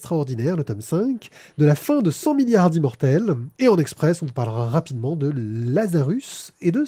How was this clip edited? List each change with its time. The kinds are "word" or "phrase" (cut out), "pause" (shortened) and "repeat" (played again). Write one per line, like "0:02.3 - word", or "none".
none